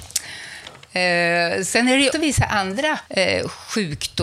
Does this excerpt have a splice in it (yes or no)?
yes